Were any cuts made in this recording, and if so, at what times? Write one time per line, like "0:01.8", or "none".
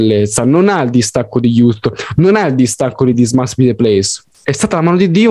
none